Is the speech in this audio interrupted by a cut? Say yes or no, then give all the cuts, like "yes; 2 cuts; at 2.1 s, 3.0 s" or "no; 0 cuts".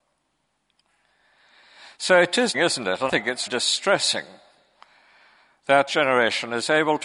yes; 4 cuts; at 2.5 s, 3.1 s, 3.5 s, 5.9 s